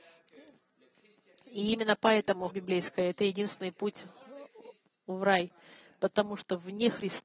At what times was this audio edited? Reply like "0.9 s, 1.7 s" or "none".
2.5 s